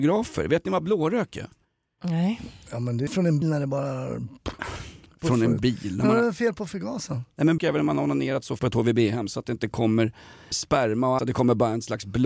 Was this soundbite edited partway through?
yes; 6 cuts; at 3.1 s, 3.4 s, 7.6 s, 8.6 s, 10.5 s, 11.2 s

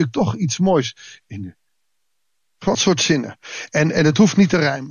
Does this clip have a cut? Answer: yes; 1 cut; at 2.7 s

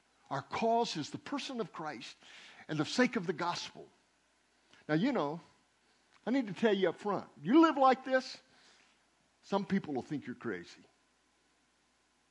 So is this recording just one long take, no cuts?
yes; 0 cuts

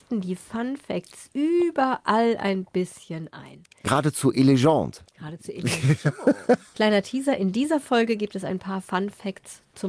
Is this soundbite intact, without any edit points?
no; 1 cut; at 5.1 s

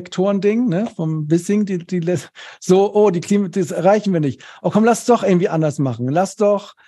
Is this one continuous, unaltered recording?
yes; 0 cuts

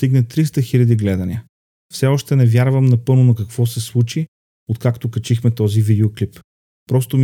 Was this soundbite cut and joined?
no; 0 cuts

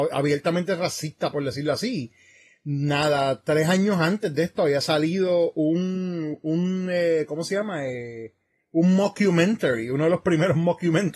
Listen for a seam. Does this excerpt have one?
no; 0 cuts

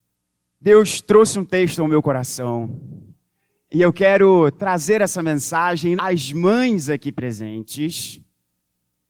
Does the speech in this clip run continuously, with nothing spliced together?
no; 1 cut; at 6.0 s

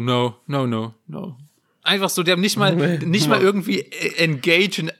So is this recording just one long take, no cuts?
yes; 0 cuts

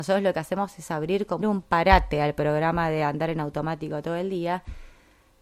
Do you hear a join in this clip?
yes; 1 cut; at 1.4 s

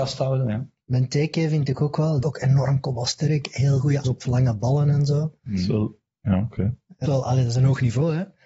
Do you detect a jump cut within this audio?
yes; 3 cuts; at 2.2 s, 4.0 s, 7.1 s

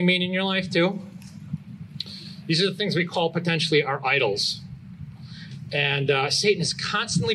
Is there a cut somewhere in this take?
no; 0 cuts

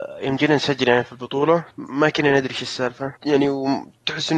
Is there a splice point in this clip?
yes; 2 cuts; at 1.7 s, 3.2 s

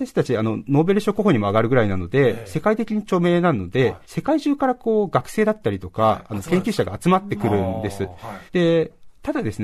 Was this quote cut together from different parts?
yes; 2 cuts; at 4.0 s, 8.5 s

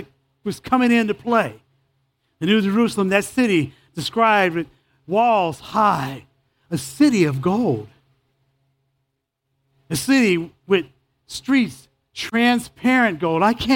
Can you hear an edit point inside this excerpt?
no; 0 cuts

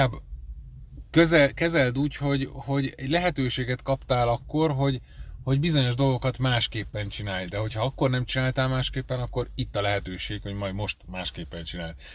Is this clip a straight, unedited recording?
yes; 0 cuts

